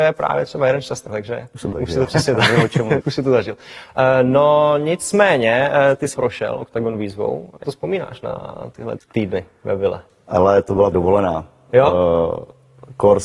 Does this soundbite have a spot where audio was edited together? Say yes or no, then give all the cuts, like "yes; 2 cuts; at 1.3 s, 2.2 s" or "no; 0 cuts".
yes; 8 cuts; at 1.1 s, 1.7 s, 2.0 s, 3.0 s, 6.1 s, 7.6 s, 9.0 s, 10.9 s